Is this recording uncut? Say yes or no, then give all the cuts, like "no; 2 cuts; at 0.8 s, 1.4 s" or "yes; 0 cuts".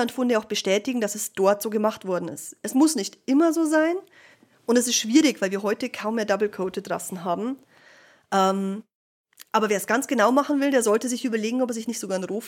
yes; 0 cuts